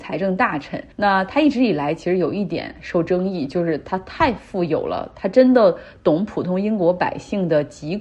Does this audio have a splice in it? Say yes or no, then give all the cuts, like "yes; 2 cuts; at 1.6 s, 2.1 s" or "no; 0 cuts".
yes; 1 cut; at 0.9 s